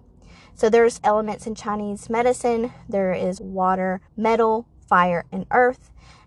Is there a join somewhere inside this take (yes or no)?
yes